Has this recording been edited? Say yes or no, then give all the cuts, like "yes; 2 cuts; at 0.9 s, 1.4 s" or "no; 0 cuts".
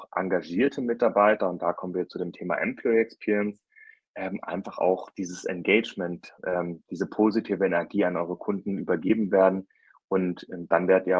no; 0 cuts